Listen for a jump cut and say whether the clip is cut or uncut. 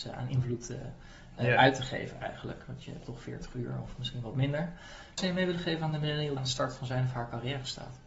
cut